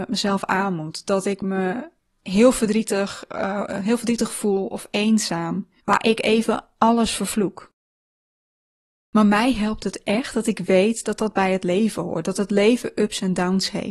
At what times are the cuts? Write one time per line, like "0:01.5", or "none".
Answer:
0:02.0
0:05.8

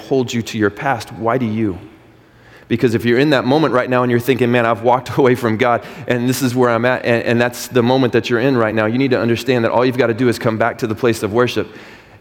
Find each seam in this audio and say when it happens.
none

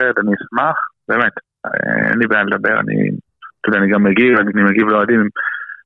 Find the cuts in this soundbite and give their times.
0:04.5

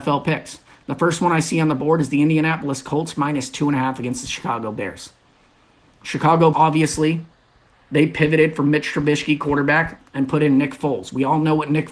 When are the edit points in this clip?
0:06.5

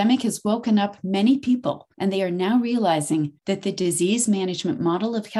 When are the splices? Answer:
0:01.9
0:03.4

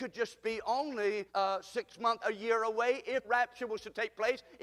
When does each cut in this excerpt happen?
0:01.3
0:02.2
0:03.2

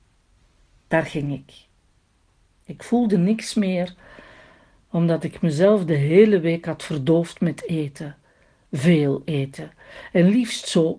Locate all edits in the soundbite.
none

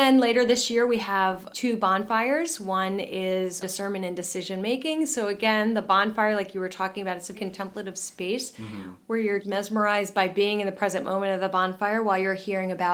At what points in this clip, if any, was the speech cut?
0:01.5
0:03.6
0:07.3
0:09.4

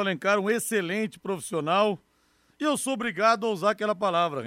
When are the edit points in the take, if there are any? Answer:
none

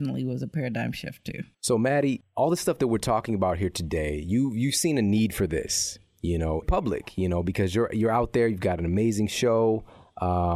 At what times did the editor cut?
0:06.6

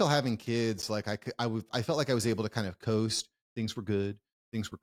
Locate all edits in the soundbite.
none

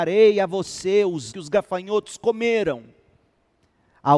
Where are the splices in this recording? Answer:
0:01.3

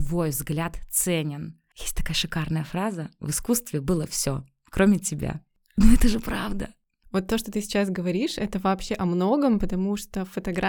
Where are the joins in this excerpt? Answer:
none

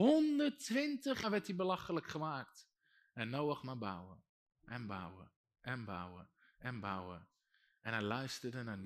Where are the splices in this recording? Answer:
0:01.2

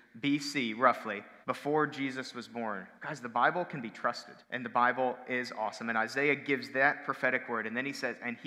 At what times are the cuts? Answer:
0:01.4
0:03.0
0:04.4

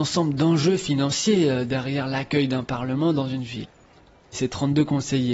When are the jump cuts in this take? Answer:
none

